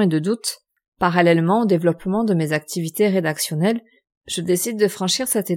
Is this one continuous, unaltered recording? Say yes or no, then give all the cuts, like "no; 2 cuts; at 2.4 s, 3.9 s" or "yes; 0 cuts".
no; 1 cut; at 4.0 s